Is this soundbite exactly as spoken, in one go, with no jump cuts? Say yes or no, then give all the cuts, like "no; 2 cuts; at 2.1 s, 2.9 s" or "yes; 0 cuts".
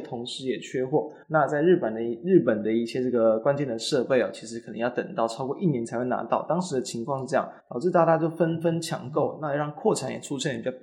no; 2 cuts; at 1.2 s, 7.6 s